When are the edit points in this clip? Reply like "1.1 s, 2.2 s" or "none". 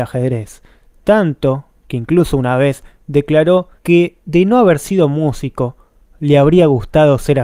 3.8 s